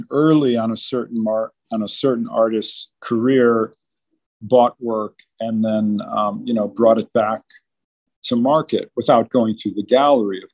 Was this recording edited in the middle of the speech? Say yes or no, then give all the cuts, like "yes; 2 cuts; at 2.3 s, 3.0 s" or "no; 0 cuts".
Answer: no; 0 cuts